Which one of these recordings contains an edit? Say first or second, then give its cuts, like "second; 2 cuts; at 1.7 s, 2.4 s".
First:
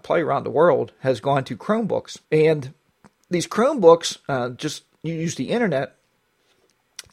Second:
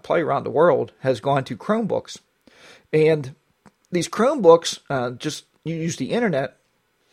first; 1 cut; at 2.2 s